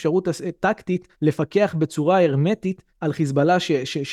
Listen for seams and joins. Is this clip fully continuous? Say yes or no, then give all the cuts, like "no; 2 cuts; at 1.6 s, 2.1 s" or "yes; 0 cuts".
no; 2 cuts; at 1.1 s, 2.9 s